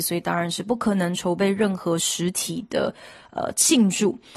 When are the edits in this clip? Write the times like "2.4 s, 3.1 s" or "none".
none